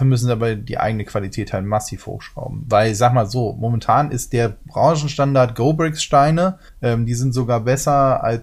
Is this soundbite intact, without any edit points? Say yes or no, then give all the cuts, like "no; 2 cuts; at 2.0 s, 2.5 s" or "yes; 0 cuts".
no; 1 cut; at 6.7 s